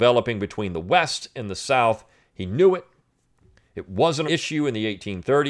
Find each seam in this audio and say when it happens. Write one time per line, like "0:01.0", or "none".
0:04.2